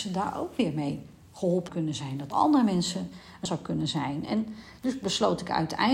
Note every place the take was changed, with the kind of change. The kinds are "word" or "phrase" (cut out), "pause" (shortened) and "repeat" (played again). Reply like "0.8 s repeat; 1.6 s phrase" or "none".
1.7 s word; 2.3 s word; 3.5 s word